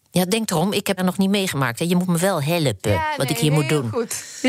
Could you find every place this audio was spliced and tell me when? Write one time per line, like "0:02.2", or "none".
0:01.0